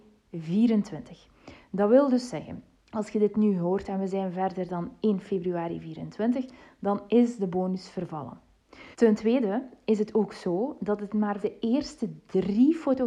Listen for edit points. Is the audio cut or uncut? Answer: cut